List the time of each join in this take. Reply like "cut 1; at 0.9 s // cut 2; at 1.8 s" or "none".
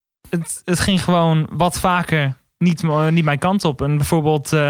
none